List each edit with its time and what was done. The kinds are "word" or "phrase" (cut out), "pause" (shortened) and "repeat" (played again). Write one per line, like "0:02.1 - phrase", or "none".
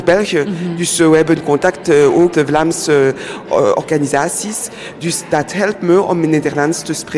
0:02.3 - word

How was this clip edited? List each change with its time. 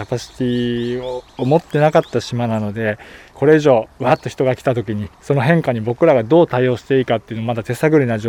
0:01.3 - pause
0:03.9 - pause
0:05.1 - pause

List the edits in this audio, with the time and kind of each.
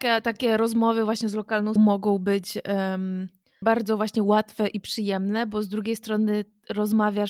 0:01.8 - word
0:03.6 - word

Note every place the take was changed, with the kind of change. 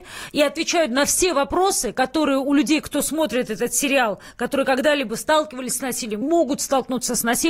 0:06.2 - word

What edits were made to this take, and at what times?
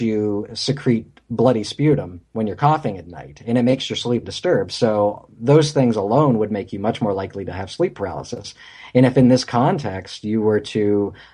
0:04.2 - word

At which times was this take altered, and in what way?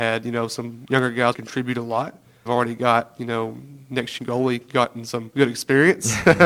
0:01.3 - word
0:02.5 - word
0:04.2 - word

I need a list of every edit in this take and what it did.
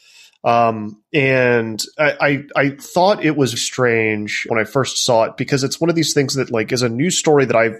0:03.6 - word
0:04.5 - word

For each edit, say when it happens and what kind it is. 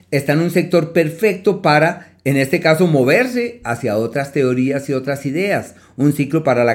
none

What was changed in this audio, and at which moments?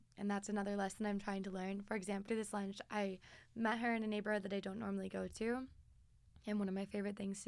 0:02.3 - word

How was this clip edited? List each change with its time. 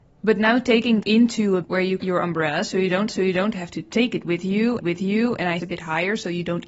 0:01.0 - word
0:01.6 - word
0:02.0 - phrase
0:03.1 - repeat
0:04.8 - repeat
0:05.6 - phrase

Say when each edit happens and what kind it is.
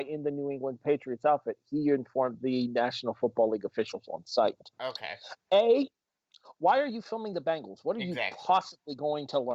0:04.7 - pause

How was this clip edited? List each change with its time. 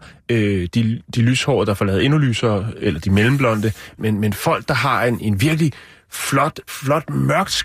0:02.8 - word
0:04.0 - word
0:05.2 - word
0:06.7 - word

